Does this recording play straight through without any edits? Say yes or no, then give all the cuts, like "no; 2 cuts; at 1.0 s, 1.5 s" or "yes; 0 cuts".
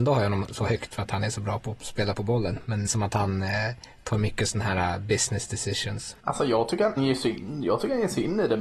no; 4 cuts; at 0.9 s, 2.9 s, 6.2 s, 7.0 s